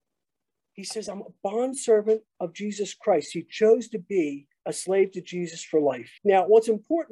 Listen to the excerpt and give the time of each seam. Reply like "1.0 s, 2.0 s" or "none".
4.6 s, 6.2 s

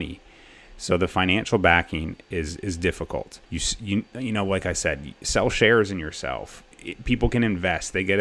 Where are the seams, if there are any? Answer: 3.4 s, 6.7 s

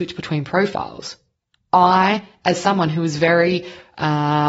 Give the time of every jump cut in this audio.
none

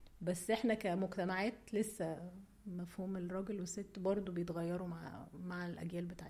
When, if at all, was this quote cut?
none

